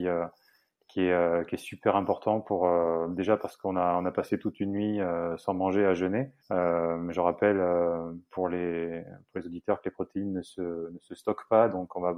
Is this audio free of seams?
no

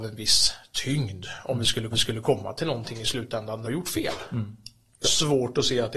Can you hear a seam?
yes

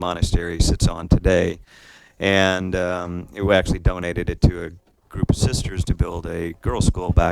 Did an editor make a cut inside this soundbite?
no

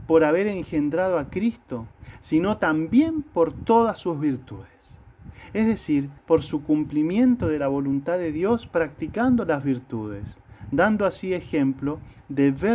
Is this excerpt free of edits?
no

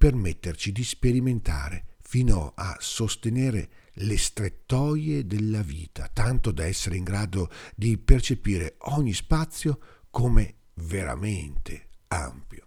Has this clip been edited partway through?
no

